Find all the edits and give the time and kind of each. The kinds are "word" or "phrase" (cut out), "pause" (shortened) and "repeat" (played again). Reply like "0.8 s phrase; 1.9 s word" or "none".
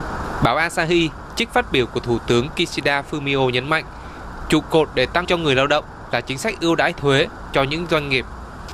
5.2 s word

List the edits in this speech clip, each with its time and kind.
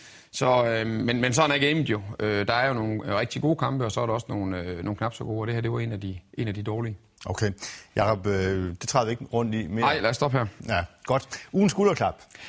none

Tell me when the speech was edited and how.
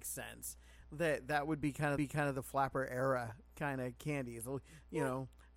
2.0 s repeat

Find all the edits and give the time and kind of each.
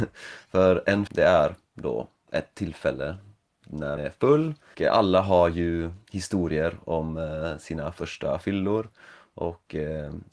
1.1 s word; 4.0 s word; 4.7 s word

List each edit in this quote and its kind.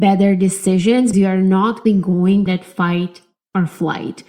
1.1 s word; 1.8 s word; 2.5 s word

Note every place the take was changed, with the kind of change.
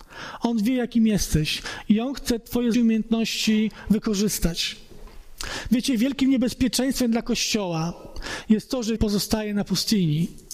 2.7 s word; 9.0 s word

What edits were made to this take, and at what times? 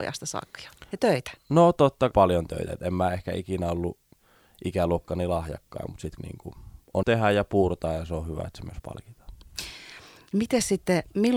1.0 s word; 2.1 s word; 6.2 s word; 7.0 s word

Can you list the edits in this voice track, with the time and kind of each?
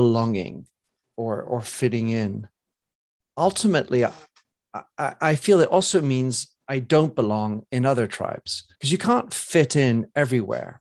2.9 s pause; 8.7 s pause

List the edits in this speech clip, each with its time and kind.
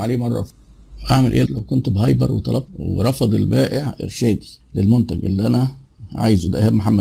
1.5 s word; 2.7 s word; 4.6 s pause

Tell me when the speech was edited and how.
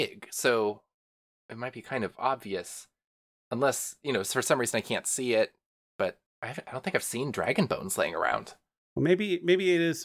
6.3 s pause

